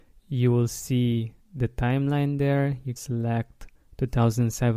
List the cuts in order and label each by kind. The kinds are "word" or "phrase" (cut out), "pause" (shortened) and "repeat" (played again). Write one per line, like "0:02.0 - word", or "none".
0:01.4 - pause
0:03.0 - word